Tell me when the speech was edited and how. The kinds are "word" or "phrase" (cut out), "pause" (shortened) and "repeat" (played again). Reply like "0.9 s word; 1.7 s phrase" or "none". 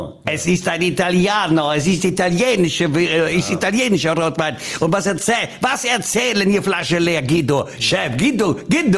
none